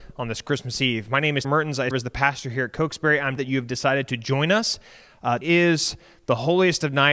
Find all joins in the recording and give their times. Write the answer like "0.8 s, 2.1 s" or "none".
1.4 s, 1.9 s, 3.4 s, 5.4 s